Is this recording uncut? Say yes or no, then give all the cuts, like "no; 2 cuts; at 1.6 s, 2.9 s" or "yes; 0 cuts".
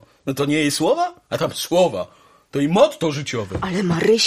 yes; 0 cuts